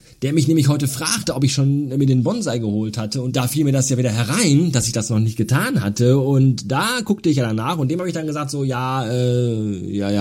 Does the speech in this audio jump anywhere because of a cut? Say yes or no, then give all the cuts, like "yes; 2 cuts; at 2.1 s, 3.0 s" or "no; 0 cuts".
no; 0 cuts